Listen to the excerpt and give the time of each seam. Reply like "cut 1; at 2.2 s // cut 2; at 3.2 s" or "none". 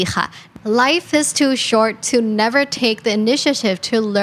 none